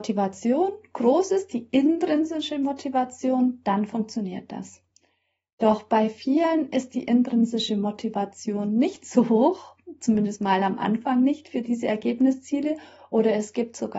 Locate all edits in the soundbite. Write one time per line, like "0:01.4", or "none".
none